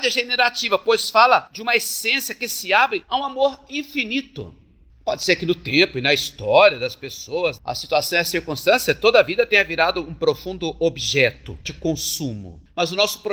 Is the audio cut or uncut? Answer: uncut